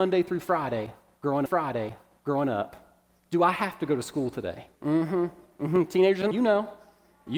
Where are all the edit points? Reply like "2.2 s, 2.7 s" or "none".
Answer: 1.5 s, 4.8 s, 6.3 s